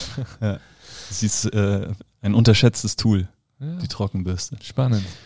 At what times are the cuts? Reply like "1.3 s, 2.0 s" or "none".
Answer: none